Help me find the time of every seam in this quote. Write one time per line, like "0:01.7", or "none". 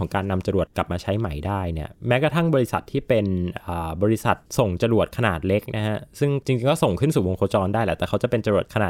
0:01.9
0:04.5